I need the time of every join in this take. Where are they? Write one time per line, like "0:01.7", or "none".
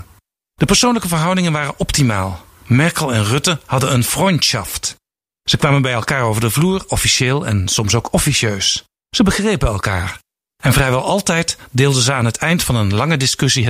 none